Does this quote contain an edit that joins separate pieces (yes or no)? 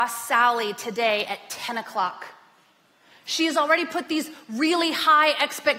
no